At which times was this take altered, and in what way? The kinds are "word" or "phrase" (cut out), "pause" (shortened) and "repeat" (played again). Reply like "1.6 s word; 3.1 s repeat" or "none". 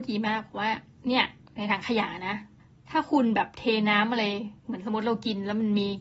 2.6 s pause; 4.6 s pause